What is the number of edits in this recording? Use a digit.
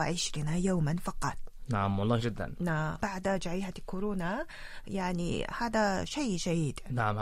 2